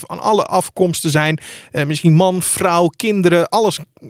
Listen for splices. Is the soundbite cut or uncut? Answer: uncut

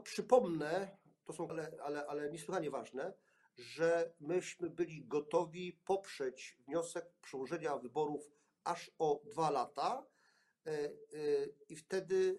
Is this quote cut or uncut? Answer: cut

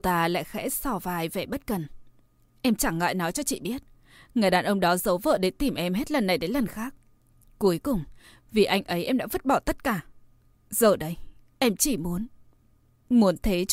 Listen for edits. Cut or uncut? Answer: uncut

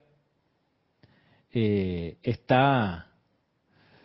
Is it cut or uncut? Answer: uncut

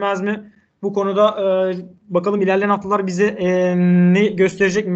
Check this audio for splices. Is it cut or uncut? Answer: uncut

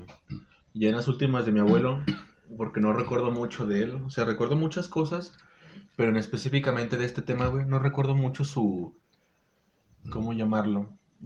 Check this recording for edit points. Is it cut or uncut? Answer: uncut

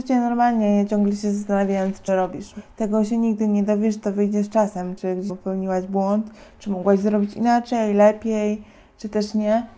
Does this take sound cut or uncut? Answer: cut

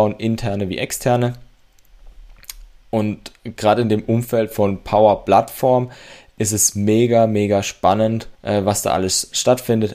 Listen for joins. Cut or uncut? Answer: cut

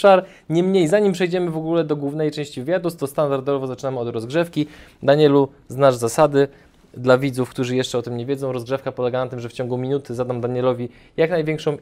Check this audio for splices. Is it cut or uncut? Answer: uncut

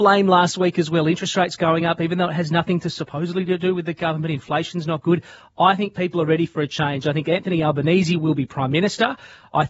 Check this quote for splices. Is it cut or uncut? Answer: uncut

